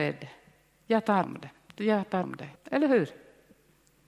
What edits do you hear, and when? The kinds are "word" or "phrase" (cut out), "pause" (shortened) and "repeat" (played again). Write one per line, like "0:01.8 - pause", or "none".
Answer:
0:01.2 - word
0:02.2 - word
0:02.6 - pause